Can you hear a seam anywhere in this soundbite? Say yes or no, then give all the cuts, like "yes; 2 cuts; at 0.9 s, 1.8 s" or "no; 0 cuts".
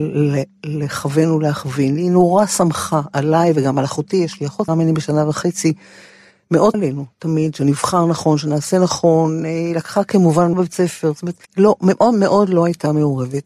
yes; 4 cuts; at 4.7 s, 6.7 s, 10.5 s, 11.4 s